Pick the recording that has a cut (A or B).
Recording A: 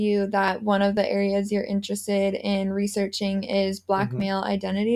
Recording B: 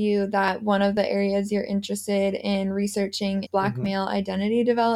B